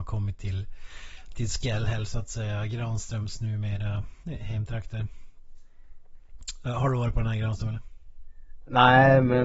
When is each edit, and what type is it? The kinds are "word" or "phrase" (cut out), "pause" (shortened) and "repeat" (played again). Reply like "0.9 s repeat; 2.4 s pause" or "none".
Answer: none